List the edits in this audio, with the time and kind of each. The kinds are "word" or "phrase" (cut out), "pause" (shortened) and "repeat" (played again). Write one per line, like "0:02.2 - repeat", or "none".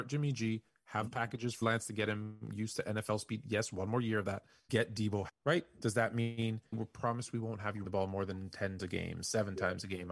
0:01.1 - word
0:01.6 - word
0:04.7 - word
0:05.3 - word
0:06.7 - word
0:07.8 - word
0:08.8 - word